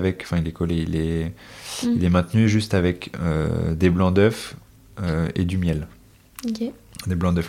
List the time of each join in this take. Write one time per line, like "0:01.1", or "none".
none